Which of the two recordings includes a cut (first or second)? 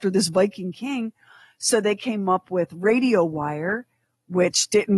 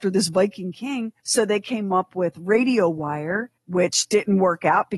second